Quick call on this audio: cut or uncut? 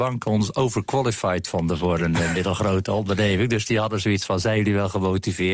uncut